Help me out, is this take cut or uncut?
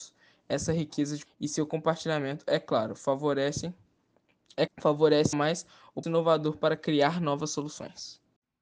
cut